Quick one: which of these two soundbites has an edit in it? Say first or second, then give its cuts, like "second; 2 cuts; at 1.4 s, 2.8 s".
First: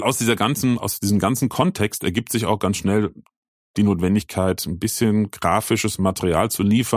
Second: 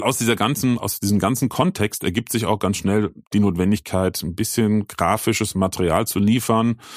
second; 1 cut; at 3.2 s